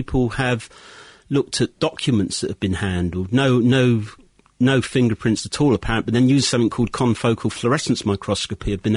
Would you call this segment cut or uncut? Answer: uncut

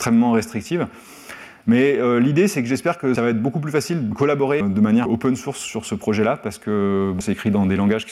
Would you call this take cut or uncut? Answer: cut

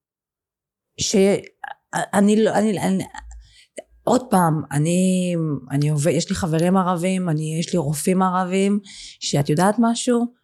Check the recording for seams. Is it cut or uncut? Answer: uncut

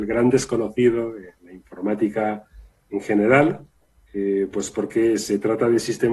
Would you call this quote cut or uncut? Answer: uncut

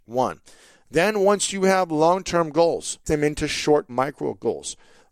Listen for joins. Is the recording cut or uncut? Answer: cut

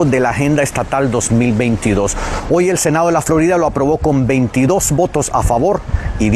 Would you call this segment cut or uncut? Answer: uncut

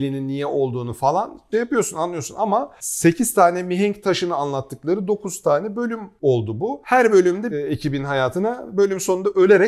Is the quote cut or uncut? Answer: cut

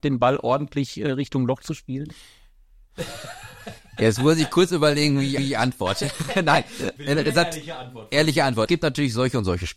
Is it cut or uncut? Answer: cut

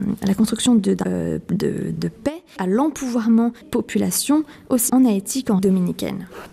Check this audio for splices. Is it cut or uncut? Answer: cut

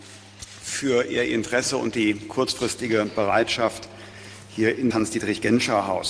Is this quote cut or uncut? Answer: cut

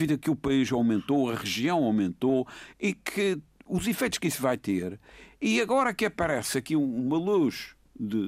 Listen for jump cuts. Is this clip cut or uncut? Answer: uncut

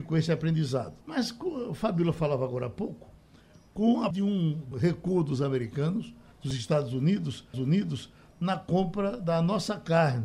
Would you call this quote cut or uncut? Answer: cut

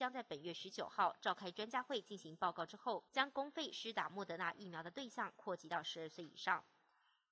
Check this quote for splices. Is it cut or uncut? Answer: cut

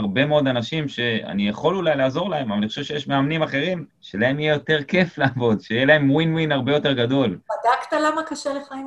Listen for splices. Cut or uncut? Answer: cut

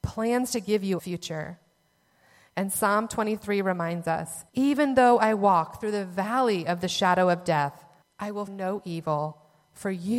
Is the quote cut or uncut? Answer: cut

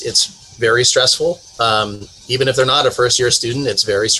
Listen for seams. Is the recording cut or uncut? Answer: uncut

